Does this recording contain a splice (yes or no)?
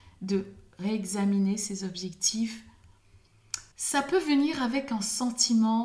yes